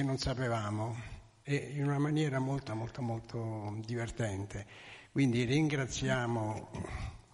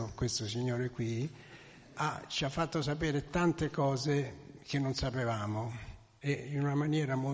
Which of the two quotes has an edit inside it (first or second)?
first